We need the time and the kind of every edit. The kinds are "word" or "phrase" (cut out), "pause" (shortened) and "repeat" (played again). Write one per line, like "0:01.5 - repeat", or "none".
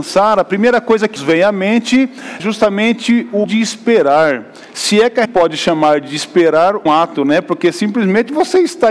0:01.2 - word
0:02.4 - word
0:03.4 - word
0:05.2 - word
0:06.9 - word